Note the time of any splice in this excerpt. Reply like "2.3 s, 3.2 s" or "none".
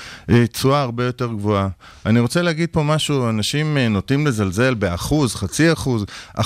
none